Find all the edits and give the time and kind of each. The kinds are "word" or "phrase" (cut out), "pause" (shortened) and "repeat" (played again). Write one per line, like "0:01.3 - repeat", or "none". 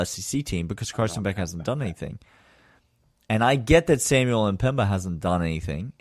none

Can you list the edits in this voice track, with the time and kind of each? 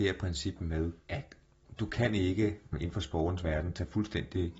0:01.0 - pause

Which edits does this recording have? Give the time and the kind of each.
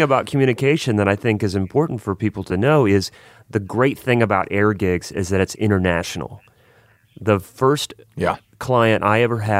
none

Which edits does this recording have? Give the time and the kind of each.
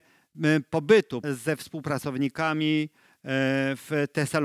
0:01.2 - word

